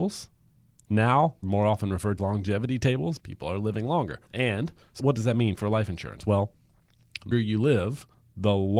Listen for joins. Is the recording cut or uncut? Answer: cut